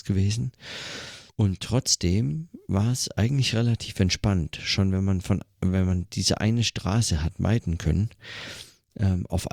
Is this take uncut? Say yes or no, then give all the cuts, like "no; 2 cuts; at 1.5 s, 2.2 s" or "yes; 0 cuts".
no; 1 cut; at 1.3 s